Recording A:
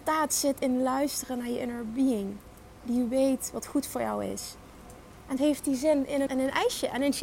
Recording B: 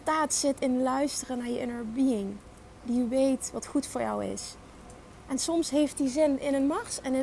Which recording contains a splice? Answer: A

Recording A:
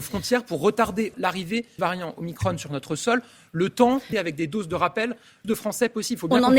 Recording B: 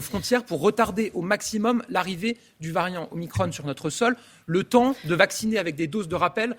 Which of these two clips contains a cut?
A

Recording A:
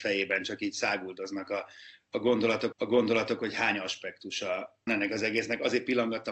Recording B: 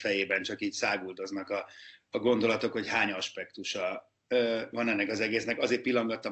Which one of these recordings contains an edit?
A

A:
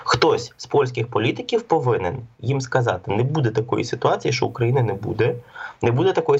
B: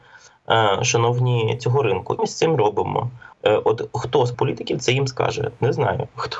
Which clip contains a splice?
B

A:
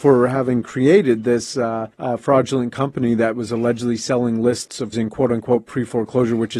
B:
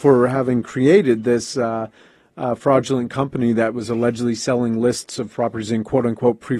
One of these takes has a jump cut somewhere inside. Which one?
A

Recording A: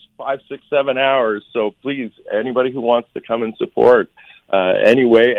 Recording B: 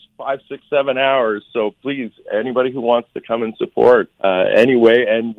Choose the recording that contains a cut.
B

